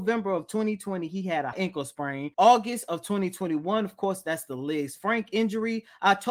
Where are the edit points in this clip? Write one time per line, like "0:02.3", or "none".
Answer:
0:01.5
0:02.3